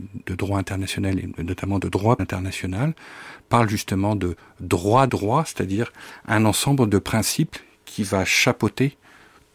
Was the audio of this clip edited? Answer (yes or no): yes